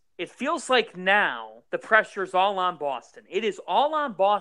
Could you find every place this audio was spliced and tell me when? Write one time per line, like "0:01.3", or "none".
0:01.7